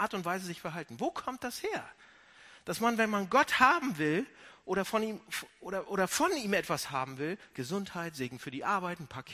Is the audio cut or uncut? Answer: uncut